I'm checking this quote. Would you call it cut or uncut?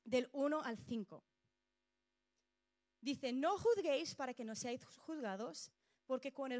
uncut